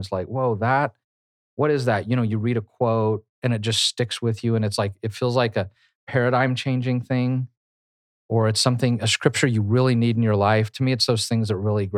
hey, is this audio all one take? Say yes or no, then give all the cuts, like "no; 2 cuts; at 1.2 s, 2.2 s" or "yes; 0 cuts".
yes; 0 cuts